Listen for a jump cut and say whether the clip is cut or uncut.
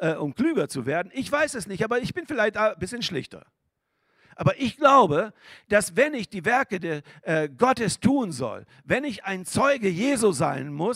uncut